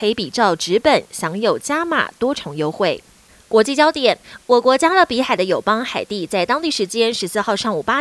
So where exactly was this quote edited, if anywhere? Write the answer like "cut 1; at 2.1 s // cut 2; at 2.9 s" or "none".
none